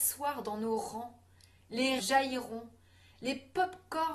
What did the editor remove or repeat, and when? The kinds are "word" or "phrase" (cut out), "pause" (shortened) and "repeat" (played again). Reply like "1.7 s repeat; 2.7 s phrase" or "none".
2.0 s word